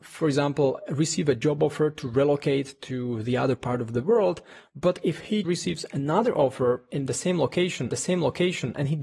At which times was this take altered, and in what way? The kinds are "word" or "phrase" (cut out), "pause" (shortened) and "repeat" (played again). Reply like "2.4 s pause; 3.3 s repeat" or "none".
5.4 s word; 7.9 s repeat

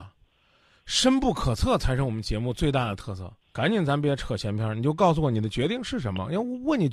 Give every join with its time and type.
3.4 s pause

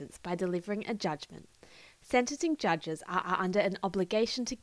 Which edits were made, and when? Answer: 3.2 s repeat

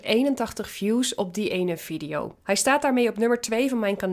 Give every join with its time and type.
2.4 s pause

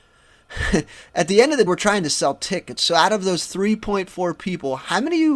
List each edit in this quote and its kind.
1.7 s word

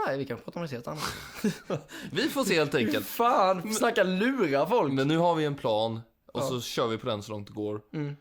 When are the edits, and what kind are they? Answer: none

